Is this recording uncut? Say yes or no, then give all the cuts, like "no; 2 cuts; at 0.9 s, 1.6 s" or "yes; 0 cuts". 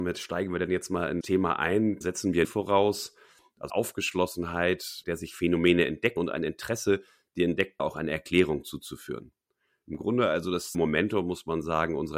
no; 8 cuts; at 1.2 s, 2.0 s, 2.4 s, 3.7 s, 5.0 s, 6.2 s, 7.8 s, 10.7 s